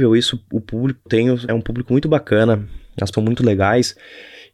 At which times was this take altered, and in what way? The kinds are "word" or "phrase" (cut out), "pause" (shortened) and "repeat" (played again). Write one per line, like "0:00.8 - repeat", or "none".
0:01.1 - word
0:01.5 - word
0:03.1 - word